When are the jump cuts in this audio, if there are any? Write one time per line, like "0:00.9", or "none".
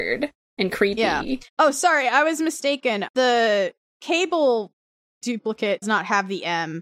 0:01.5
0:03.1
0:03.8
0:05.8